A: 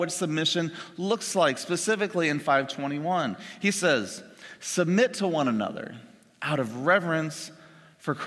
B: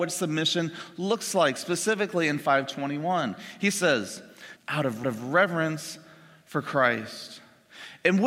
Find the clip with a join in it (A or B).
B